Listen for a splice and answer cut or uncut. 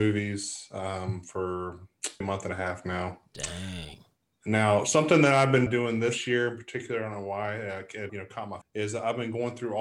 cut